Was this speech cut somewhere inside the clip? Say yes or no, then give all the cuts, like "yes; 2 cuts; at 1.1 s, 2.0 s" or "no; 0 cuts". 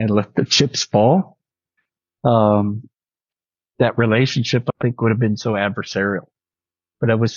yes; 1 cut; at 4.8 s